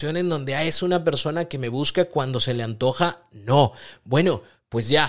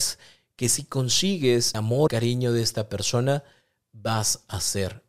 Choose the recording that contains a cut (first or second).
second